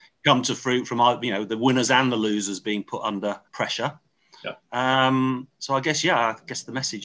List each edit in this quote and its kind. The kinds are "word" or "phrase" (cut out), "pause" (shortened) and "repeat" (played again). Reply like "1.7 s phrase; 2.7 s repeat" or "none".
3.5 s pause